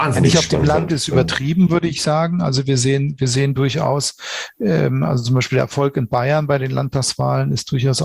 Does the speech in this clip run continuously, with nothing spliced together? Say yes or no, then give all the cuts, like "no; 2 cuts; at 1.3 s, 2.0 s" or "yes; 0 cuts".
yes; 0 cuts